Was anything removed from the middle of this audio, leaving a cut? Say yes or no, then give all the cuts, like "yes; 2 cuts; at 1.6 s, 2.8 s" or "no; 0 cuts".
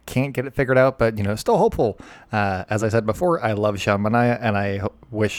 no; 0 cuts